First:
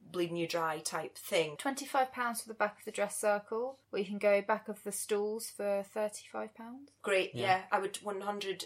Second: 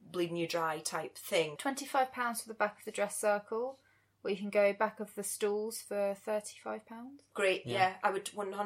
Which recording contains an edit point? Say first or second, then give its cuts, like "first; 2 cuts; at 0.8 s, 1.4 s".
first; 1 cut; at 3.8 s